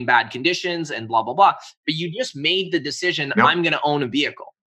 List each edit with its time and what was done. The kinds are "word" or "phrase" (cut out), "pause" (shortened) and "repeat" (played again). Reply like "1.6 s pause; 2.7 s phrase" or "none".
none